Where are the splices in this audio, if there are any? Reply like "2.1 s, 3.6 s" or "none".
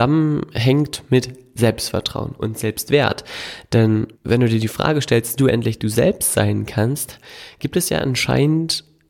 2.4 s, 4.1 s, 5.4 s

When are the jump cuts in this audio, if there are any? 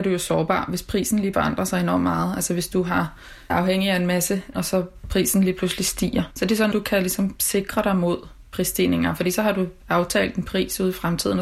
1.3 s, 3.5 s, 4.5 s, 6.7 s

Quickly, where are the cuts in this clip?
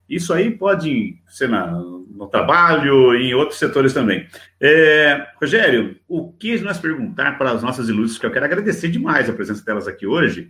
1.3 s, 4.4 s, 6.0 s, 6.8 s, 8.2 s

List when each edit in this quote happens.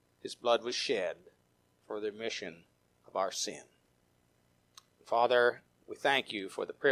none

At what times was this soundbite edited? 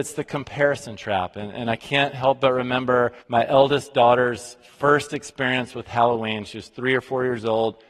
3.2 s

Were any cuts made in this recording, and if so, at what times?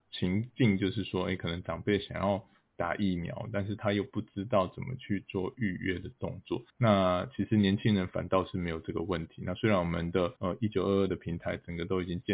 6.7 s, 10.4 s

